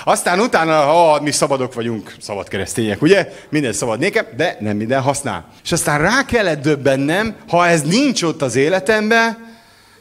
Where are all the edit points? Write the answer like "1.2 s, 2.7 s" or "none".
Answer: 5.6 s